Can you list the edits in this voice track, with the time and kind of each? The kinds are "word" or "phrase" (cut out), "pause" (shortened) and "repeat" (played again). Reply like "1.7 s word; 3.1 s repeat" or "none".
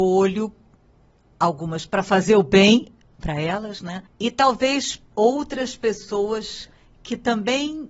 1.9 s word; 4.1 s pause; 5.1 s word